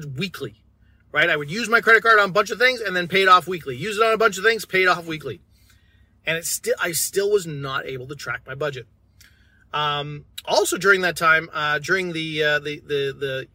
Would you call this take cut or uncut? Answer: uncut